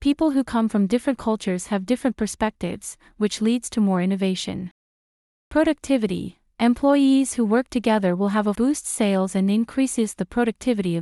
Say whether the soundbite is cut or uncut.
cut